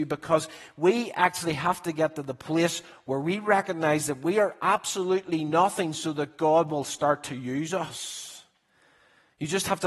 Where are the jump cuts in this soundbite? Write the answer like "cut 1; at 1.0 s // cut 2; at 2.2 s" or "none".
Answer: none